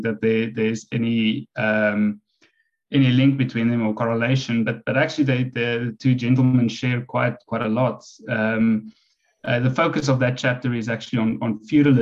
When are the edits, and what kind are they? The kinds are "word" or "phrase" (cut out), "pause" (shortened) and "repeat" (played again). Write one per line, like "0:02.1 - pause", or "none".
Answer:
none